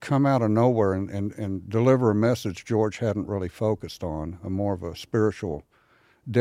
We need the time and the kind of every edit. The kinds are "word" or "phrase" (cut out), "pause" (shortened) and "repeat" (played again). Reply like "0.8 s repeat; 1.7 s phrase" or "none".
none